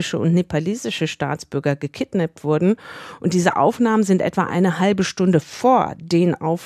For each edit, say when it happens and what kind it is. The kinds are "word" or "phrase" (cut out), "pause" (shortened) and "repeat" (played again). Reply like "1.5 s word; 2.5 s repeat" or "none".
none